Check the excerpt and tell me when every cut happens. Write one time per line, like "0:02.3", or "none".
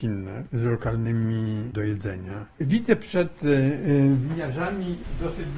0:01.7
0:02.5